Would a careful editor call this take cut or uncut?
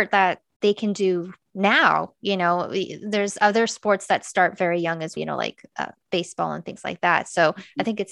cut